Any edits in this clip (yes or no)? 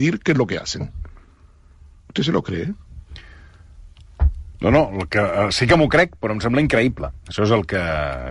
no